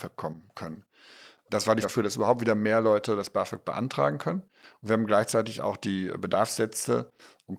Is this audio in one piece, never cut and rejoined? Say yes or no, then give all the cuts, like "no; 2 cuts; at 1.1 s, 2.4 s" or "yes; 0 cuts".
no; 1 cut; at 1.8 s